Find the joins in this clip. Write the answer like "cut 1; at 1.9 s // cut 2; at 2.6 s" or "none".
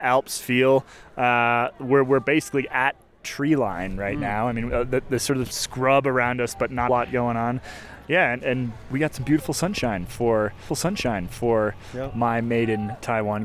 cut 1; at 5.5 s // cut 2; at 6.9 s // cut 3; at 8.4 s // cut 4; at 10.7 s